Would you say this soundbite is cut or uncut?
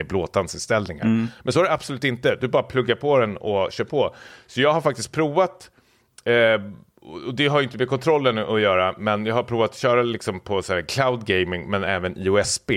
uncut